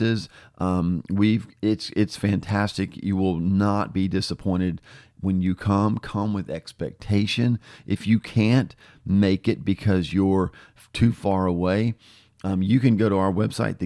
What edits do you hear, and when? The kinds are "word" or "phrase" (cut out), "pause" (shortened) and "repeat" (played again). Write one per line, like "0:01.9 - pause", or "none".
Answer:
none